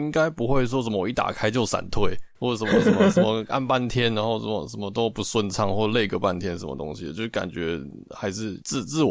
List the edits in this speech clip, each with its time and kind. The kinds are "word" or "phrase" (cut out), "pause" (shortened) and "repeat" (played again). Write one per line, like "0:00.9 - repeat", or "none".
0:02.3 - pause